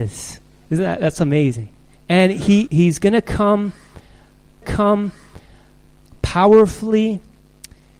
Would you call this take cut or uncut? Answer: cut